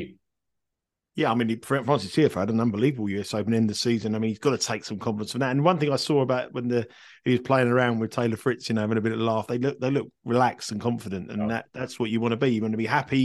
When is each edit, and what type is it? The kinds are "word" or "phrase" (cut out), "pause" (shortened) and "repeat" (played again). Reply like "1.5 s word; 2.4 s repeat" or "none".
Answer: none